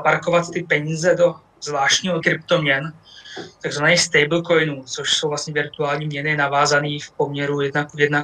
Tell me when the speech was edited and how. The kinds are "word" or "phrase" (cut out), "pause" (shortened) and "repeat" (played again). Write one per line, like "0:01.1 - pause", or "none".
0:02.2 - word